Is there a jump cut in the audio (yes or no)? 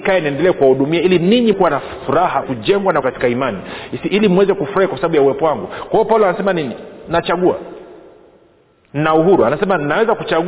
yes